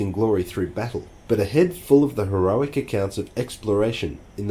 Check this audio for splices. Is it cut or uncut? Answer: uncut